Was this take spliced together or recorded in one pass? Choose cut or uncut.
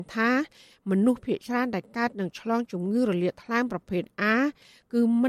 uncut